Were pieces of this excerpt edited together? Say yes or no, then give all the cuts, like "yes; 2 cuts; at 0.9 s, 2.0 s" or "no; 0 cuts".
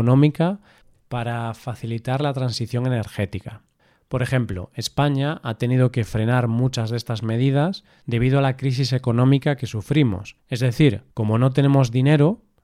yes; 2 cuts; at 10.4 s, 11.1 s